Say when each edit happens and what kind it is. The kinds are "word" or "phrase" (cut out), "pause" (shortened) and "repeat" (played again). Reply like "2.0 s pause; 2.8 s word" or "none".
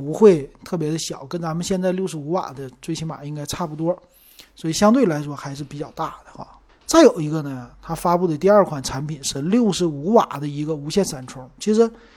6.7 s pause